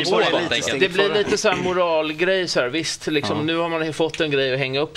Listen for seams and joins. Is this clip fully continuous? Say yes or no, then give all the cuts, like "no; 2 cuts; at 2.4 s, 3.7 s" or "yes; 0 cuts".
yes; 0 cuts